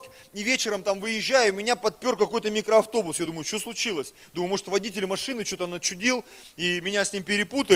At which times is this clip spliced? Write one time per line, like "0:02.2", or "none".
none